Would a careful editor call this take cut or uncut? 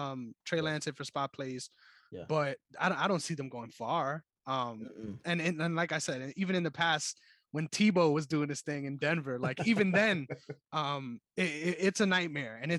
uncut